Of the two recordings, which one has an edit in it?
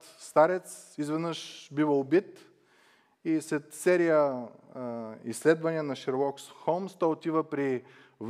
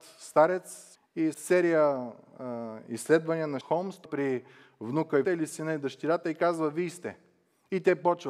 second; 5 cuts; at 0.9 s, 1.3 s, 3.6 s, 4.0 s, 5.2 s

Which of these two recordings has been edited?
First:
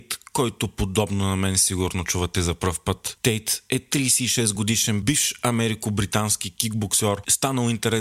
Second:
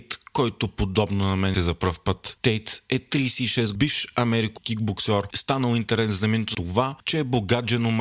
second; 4 cuts; at 1.5 s, 3.7 s, 4.6 s, 6.5 s

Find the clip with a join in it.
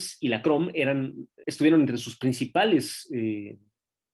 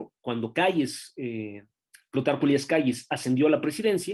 first; 1 cut; at 1.4 s

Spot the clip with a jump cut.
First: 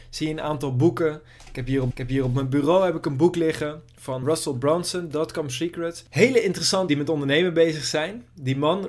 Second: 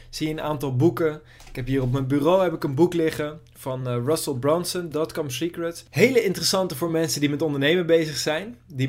first; 3 cuts; at 1.9 s, 4.2 s, 6.9 s

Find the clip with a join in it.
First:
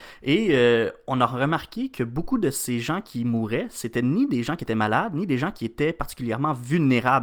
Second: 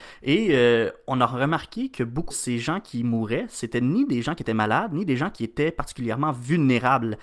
second; 1 cut; at 2.3 s

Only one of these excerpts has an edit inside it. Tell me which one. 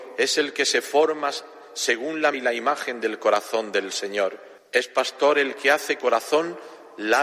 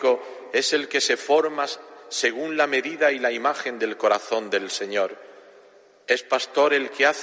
first; 3 cuts; at 2.3 s, 4.6 s, 6.0 s

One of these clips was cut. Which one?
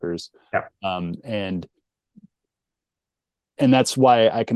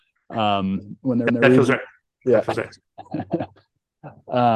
second; 1 cut; at 1.3 s

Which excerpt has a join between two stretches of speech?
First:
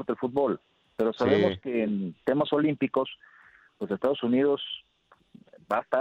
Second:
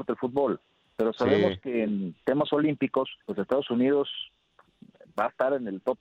second; 1 cut; at 3.2 s

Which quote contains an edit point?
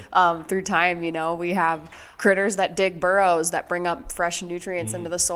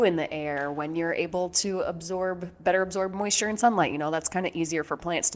first; 1 cut; at 2.2 s

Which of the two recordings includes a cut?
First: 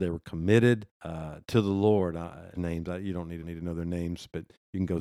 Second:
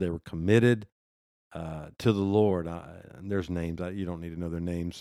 first; 3 cuts; at 0.9 s, 2.5 s, 3.4 s

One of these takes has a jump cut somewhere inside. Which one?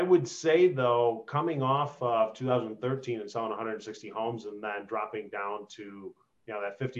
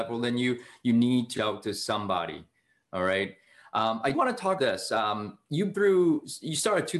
second; 4 cuts; at 1.4 s, 4.1 s, 4.6 s, 5.7 s

